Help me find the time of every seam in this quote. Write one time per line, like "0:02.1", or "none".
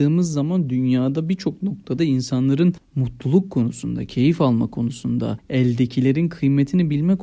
0:02.0